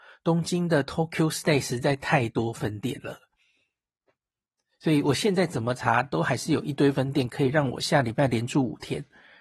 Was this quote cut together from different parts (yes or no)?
no